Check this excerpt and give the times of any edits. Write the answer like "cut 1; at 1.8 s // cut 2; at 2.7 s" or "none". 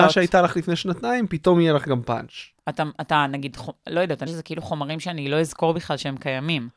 cut 1; at 4.3 s